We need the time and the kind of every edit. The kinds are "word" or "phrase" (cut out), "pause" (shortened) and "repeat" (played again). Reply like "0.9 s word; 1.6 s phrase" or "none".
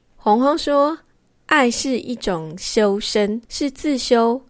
3.5 s pause